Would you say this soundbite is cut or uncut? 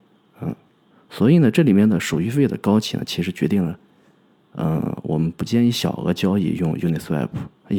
uncut